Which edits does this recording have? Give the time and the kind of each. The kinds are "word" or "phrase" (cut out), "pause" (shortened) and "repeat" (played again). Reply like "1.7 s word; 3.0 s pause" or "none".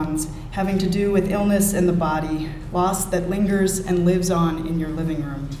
none